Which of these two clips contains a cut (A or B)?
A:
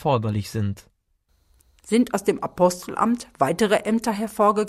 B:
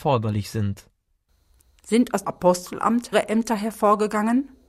B